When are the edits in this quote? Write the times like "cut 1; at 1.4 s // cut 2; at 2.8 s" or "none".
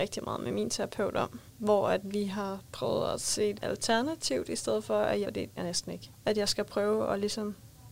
cut 1; at 1.5 s // cut 2; at 2.6 s // cut 3; at 3.5 s // cut 4; at 5.2 s // cut 5; at 5.6 s